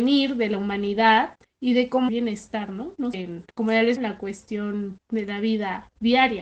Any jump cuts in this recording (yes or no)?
yes